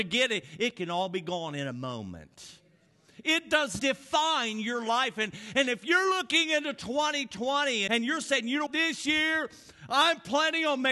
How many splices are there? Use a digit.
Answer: 3